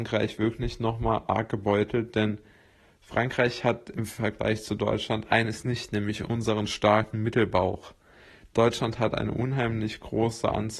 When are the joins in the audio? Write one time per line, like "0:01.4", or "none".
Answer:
none